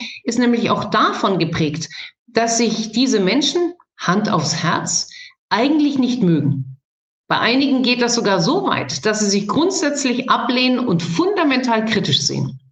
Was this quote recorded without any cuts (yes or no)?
yes